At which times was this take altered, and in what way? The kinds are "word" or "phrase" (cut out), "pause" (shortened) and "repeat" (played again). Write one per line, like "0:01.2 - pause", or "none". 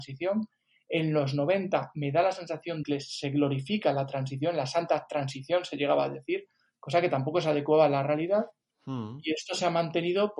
0:02.8 - word